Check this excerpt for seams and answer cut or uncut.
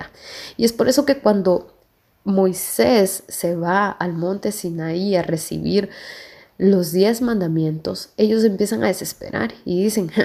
uncut